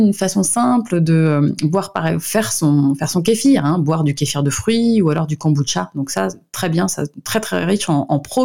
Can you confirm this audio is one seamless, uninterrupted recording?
yes; 0 cuts

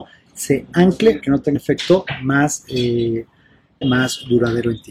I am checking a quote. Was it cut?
yes; 3 cuts; at 1.2 s, 1.6 s, 3.8 s

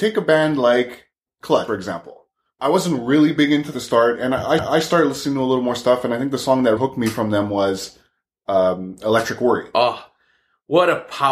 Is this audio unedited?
no; 4 cuts; at 1.7 s, 3.7 s, 4.6 s, 6.8 s

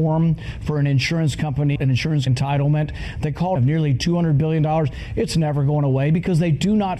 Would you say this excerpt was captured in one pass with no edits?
no; 3 cuts; at 1.8 s, 2.3 s, 3.6 s

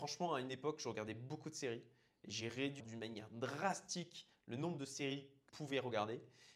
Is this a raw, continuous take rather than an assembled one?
no; 2 cuts; at 2.8 s, 5.5 s

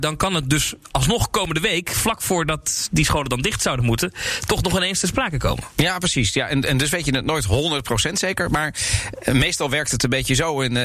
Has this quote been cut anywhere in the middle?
no; 0 cuts

